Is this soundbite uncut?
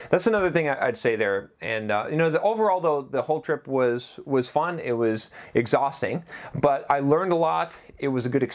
yes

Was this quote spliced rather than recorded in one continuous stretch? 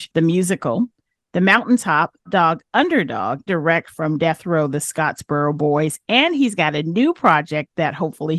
yes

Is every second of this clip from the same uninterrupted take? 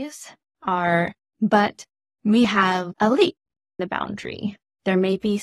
no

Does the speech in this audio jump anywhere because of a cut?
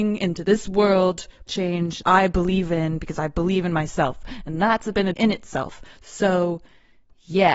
yes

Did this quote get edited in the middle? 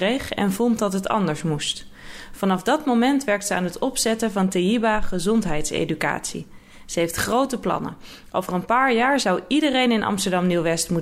no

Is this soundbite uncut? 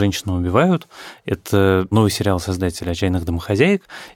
yes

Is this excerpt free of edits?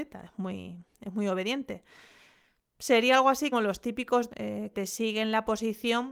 no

